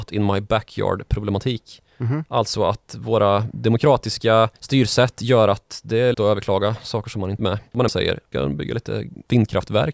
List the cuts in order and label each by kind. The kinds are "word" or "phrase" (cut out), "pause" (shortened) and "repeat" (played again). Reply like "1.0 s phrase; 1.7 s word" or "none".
1.9 s pause; 4.6 s pause; 6.1 s word; 7.4 s phrase; 7.9 s phrase; 8.3 s word